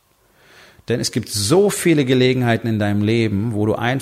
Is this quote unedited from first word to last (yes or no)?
yes